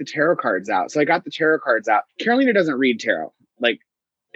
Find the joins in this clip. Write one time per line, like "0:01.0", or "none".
0:02.1